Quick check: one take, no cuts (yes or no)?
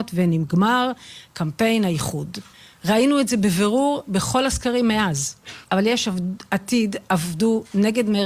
no